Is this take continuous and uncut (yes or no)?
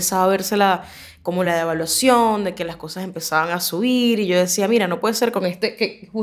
yes